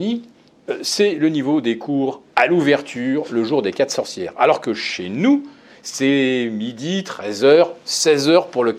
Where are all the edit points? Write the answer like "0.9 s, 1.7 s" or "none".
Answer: none